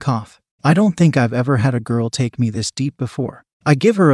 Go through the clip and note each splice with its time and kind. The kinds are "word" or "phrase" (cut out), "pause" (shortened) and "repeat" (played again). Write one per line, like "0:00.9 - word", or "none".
none